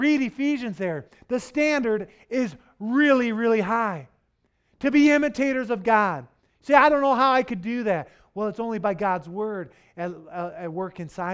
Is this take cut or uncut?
uncut